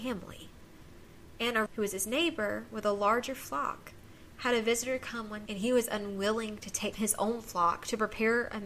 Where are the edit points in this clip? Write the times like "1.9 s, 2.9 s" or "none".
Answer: 1.7 s, 5.5 s, 6.9 s